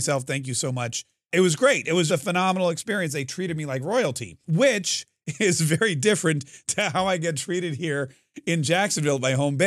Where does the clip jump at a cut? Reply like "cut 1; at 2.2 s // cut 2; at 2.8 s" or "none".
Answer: cut 1; at 1.3 s // cut 2; at 2.1 s // cut 3; at 4.4 s